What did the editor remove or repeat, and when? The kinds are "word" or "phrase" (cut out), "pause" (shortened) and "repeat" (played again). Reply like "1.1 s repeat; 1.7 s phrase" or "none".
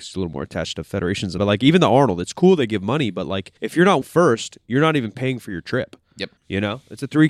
1.4 s word; 3.6 s pause; 4.0 s word; 6.4 s pause